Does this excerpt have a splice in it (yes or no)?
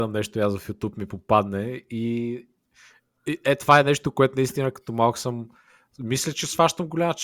no